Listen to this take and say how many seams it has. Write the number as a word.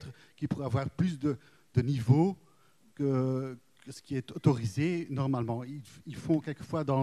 zero